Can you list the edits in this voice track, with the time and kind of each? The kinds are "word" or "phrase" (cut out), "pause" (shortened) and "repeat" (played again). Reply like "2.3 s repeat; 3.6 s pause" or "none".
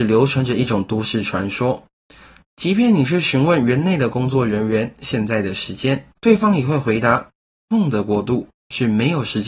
6.2 s pause